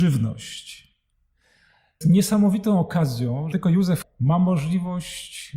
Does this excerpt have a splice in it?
yes; 3 cuts; at 2.0 s, 3.5 s, 4.0 s

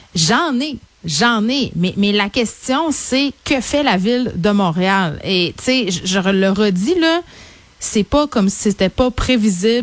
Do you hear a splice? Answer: no; 0 cuts

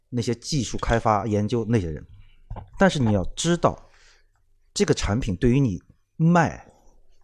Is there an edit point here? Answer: no; 0 cuts

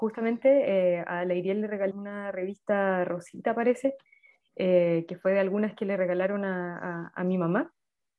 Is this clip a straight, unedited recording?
no; 1 cut; at 1.9 s

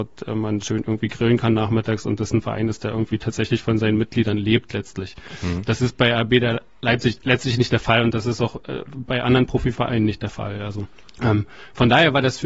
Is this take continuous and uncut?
no; 1 cut; at 11.0 s

